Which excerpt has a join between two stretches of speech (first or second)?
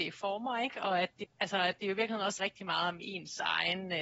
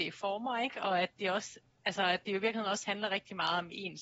first